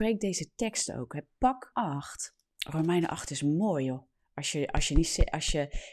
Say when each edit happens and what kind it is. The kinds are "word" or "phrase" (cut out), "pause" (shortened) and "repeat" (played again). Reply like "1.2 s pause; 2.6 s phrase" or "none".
1.7 s word